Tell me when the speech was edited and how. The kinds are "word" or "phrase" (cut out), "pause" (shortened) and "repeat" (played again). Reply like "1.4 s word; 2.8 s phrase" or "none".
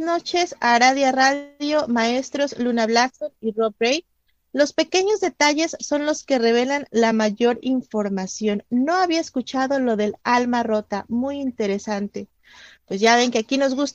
none